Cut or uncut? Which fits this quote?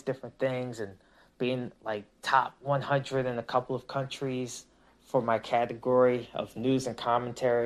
uncut